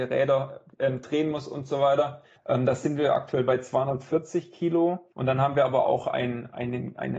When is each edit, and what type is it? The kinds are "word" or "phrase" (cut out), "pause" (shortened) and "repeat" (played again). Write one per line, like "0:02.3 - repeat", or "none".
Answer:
0:02.4 - pause
0:05.1 - pause